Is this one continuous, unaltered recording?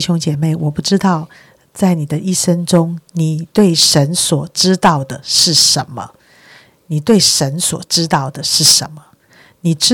yes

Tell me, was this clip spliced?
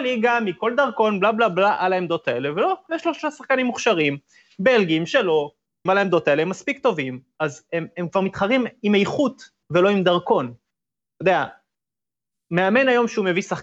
yes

